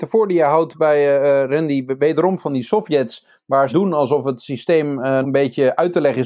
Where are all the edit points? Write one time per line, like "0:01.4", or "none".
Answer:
0:03.7
0:05.2